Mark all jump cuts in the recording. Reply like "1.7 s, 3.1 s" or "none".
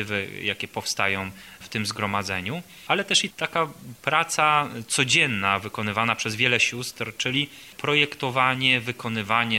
none